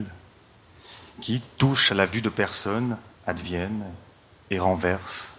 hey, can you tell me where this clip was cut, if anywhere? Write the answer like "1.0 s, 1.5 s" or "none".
1.9 s, 3.1 s